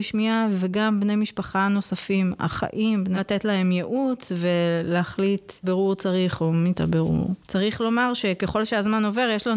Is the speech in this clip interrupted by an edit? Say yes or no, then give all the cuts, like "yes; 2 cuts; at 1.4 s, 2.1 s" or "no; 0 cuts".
yes; 3 cuts; at 3.2 s, 5.6 s, 6.7 s